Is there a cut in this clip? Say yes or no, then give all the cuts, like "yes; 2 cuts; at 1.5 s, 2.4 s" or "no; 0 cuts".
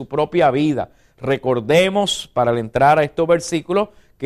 no; 0 cuts